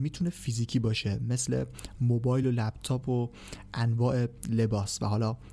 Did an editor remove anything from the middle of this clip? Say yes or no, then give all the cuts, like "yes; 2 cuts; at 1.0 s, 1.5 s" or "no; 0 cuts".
no; 0 cuts